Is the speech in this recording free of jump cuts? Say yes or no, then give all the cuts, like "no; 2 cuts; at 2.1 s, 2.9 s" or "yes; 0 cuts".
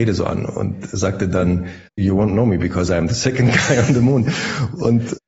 no; 1 cut; at 1.9 s